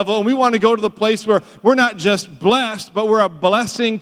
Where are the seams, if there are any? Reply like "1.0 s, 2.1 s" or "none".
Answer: none